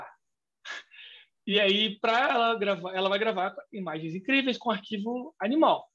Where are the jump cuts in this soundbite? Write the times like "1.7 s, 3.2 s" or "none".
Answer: none